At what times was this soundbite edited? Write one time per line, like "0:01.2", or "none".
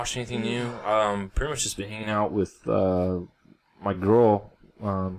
none